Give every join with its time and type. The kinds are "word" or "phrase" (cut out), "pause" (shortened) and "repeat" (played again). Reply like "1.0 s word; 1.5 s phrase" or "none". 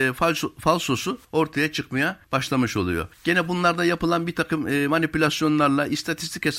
1.2 s pause; 2.2 s pause; 3.1 s pause